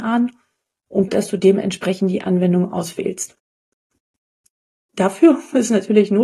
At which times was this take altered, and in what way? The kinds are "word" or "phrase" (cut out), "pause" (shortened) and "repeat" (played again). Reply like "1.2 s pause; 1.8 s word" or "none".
1.1 s word